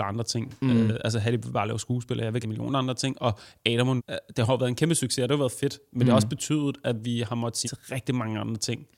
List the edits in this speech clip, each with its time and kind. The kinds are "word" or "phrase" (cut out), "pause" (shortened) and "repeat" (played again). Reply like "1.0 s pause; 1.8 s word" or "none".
2.4 s word; 4.0 s word; 7.6 s word